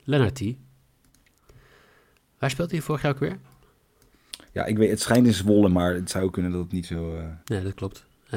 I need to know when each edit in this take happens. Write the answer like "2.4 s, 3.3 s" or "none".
4.4 s, 7.4 s